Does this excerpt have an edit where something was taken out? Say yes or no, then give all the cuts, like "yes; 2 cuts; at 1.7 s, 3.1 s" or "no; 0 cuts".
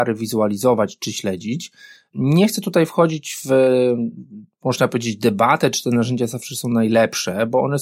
no; 0 cuts